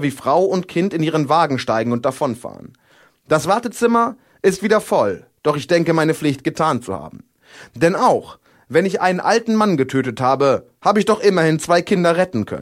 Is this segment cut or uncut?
uncut